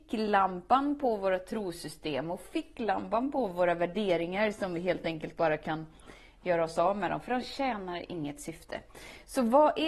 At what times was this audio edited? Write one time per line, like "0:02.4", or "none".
none